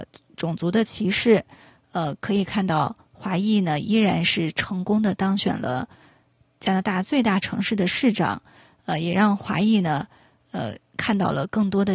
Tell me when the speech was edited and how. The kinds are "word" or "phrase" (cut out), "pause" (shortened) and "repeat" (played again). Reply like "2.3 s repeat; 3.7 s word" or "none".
none